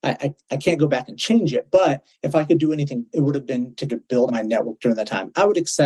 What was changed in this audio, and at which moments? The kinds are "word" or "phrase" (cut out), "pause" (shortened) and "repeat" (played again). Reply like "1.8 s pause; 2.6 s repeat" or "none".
3.1 s word; 3.9 s word; 4.3 s word